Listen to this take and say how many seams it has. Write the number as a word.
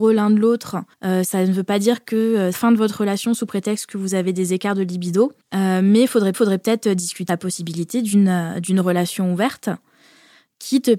five